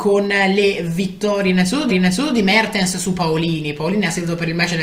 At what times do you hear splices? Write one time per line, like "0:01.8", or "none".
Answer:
0:01.9